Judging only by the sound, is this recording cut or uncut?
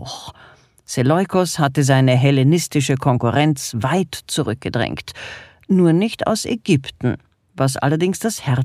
uncut